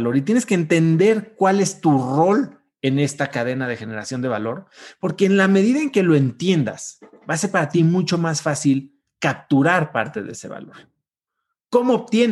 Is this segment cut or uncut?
uncut